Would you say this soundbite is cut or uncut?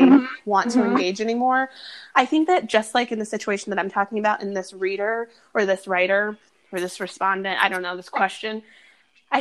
uncut